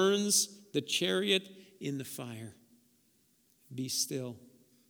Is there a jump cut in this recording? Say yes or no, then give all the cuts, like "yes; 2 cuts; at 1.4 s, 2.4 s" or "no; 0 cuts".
no; 0 cuts